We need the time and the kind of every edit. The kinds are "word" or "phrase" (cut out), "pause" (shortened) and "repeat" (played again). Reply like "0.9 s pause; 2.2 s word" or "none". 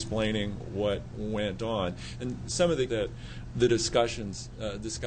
1.1 s word; 2.9 s word; 3.5 s word